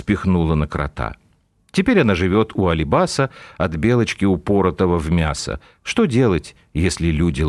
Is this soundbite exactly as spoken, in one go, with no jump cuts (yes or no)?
yes